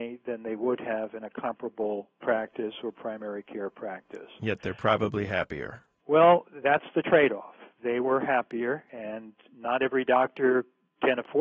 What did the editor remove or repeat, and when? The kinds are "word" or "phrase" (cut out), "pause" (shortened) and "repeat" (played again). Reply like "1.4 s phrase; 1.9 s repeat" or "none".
2.2 s word